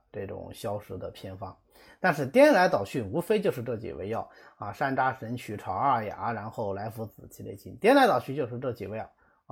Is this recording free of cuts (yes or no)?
yes